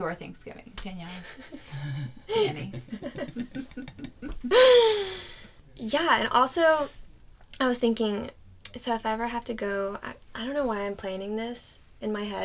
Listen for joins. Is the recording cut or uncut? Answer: uncut